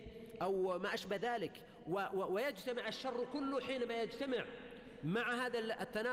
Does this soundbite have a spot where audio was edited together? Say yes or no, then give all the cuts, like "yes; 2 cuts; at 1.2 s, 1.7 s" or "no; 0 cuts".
no; 0 cuts